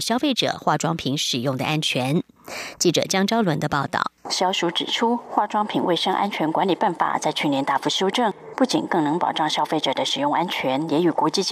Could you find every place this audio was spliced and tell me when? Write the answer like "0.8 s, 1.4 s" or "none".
4.2 s